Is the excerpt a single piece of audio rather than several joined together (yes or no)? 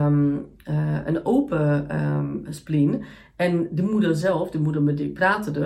yes